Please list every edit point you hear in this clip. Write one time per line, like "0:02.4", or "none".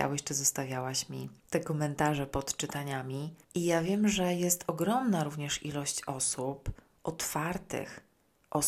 0:01.4
0:03.4